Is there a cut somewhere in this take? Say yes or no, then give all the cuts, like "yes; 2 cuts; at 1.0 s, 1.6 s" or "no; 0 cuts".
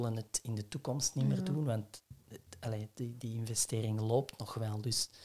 no; 0 cuts